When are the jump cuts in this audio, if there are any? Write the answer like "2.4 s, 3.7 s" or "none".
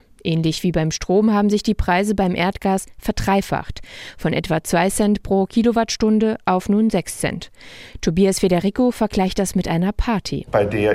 none